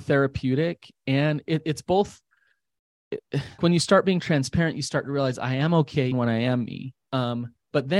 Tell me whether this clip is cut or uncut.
cut